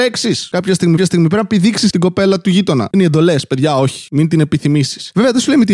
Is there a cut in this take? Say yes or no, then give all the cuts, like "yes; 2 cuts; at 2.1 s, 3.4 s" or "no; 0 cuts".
yes; 3 cuts; at 1.0 s, 1.9 s, 2.9 s